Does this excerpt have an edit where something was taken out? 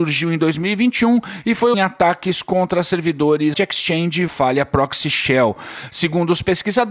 yes; 3 cuts; at 1.7 s, 3.5 s, 4.3 s

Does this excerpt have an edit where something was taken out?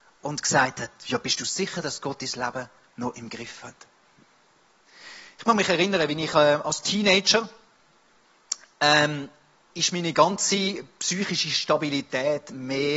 no; 0 cuts

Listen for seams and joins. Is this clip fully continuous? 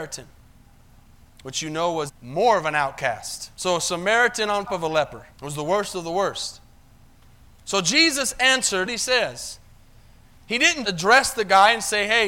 no; 6 cuts; at 2.1 s, 3.5 s, 4.7 s, 5.3 s, 8.9 s, 10.8 s

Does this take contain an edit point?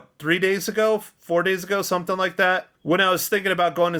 yes; 1 cut; at 2.7 s

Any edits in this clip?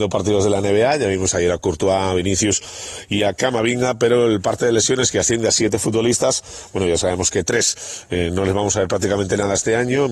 no; 0 cuts

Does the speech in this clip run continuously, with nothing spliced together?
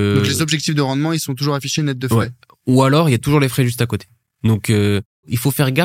yes; 0 cuts

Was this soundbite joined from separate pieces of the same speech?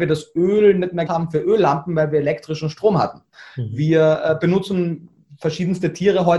yes; 1 cut; at 1.1 s

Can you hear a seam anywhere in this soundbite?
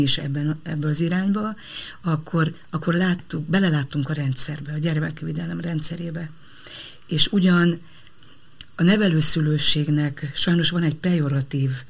no; 0 cuts

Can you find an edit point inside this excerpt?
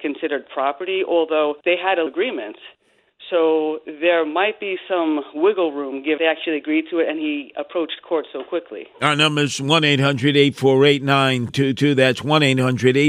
yes; 5 cuts; at 1.6 s, 2.1 s, 6.2 s, 8.9 s, 11.5 s

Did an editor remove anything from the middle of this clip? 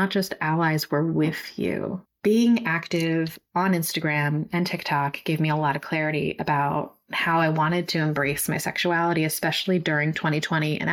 yes; 1 cut; at 2.1 s

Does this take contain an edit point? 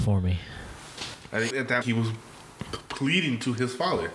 yes; 2 cuts; at 1.5 s, 1.8 s

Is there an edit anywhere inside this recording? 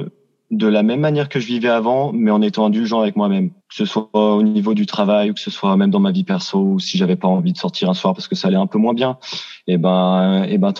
yes; 1 cut; at 3.6 s

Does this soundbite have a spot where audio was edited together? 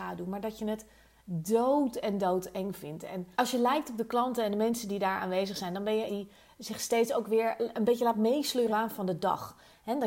yes; 3 cuts; at 3.3 s, 6.1 s, 8.7 s

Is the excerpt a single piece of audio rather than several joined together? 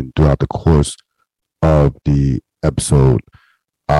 yes; 0 cuts

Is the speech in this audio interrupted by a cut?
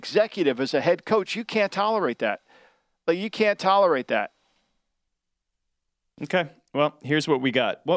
no; 0 cuts

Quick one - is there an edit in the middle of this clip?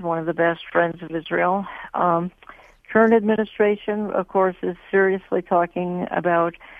no; 0 cuts

